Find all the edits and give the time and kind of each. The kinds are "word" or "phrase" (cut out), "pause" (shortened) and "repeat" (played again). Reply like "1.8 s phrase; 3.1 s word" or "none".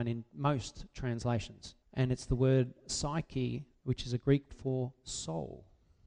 1.8 s pause; 3.7 s pause; 4.5 s word